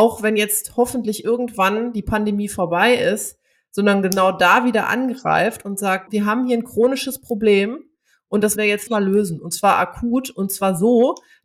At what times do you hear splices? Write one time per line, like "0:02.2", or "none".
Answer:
0:06.1
0:08.6
0:08.9